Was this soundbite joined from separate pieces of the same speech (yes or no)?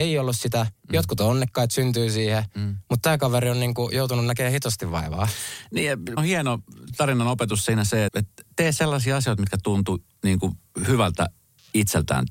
yes